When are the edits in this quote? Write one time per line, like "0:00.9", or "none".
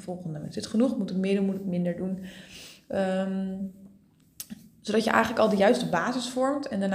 none